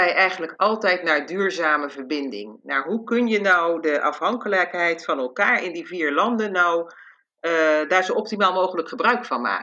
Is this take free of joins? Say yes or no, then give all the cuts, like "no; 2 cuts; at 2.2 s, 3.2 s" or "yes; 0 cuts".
yes; 0 cuts